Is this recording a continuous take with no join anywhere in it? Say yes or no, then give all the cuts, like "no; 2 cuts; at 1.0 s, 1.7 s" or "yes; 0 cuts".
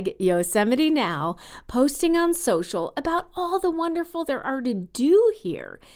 no; 1 cut; at 4.3 s